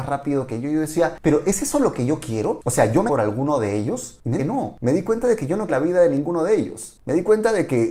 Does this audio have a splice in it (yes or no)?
yes